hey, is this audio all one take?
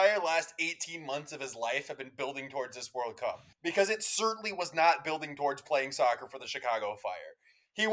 no; 1 cut; at 3.5 s

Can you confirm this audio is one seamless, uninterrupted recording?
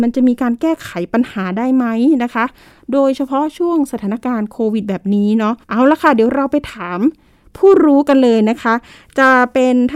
no; 1 cut; at 5.6 s

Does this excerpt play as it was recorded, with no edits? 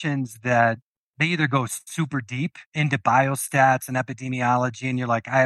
no; 1 cut; at 2.7 s

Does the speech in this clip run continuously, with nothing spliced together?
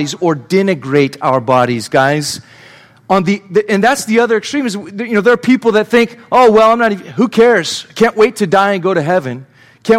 yes; 0 cuts

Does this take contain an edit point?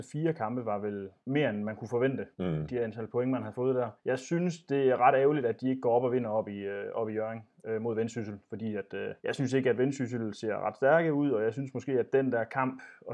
yes; 4 cuts; at 1.2 s, 2.3 s, 4.0 s, 9.2 s

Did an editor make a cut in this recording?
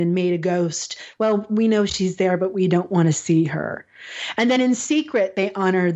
no; 0 cuts

